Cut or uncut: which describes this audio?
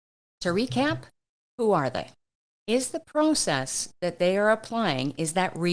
uncut